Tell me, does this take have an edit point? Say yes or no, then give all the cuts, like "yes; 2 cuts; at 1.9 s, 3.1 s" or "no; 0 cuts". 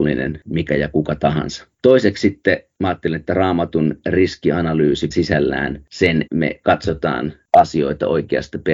yes; 3 cuts; at 1.7 s, 5.1 s, 6.3 s